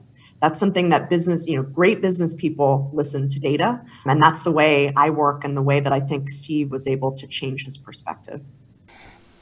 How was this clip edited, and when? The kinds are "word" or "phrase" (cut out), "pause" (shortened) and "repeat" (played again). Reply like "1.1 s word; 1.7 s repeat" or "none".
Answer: 4.1 s word; 6.7 s word